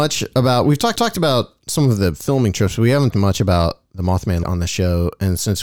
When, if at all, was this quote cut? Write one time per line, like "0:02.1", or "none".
0:00.9
0:03.1
0:04.4